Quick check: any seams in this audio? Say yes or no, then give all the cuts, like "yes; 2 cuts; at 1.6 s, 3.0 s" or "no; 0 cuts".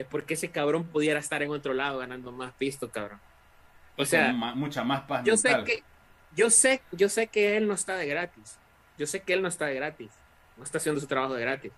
no; 0 cuts